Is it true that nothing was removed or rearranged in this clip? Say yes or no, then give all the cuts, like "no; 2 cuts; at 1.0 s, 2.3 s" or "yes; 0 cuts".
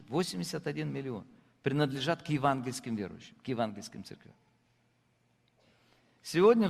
yes; 0 cuts